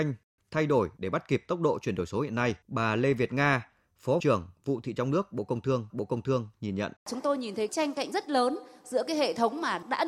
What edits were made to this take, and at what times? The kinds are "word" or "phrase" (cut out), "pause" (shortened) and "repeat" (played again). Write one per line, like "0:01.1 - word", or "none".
0:02.6 - pause
0:04.2 - word
0:05.0 - word
0:05.9 - repeat
0:07.0 - pause
0:07.7 - phrase
0:08.1 - word